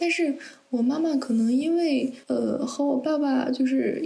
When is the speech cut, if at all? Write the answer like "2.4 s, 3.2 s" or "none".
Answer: 2.2 s